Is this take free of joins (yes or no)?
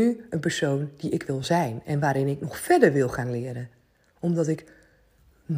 yes